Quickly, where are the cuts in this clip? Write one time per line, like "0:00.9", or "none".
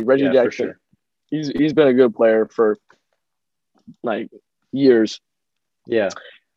none